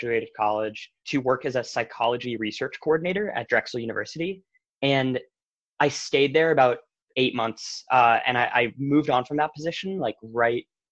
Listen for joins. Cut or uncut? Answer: uncut